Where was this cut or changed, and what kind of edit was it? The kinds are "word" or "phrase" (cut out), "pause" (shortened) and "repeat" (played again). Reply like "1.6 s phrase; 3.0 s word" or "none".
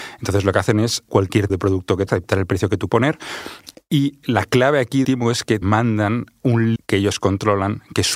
1.1 s word; 1.5 s word; 2.1 s word; 2.9 s word; 4.2 s word; 5.0 s word; 5.6 s word; 6.8 s word